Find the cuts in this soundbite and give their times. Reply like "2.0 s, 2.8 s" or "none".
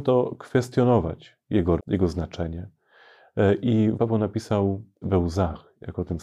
1.8 s, 4.0 s, 5.0 s